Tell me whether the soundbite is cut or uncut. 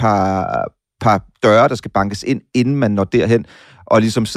uncut